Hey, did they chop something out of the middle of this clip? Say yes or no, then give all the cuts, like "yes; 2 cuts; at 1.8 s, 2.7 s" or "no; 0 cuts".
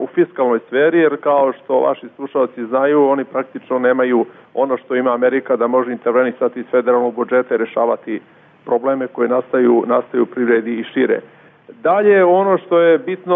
no; 0 cuts